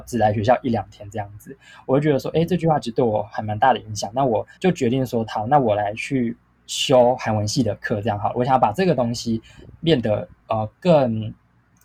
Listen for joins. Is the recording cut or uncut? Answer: cut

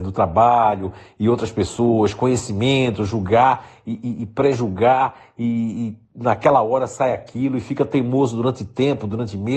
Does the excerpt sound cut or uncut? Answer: cut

